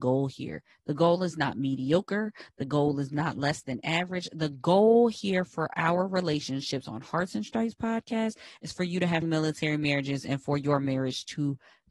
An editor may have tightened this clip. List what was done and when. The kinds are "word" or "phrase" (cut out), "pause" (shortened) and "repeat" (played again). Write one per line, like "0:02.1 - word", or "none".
0:09.2 - word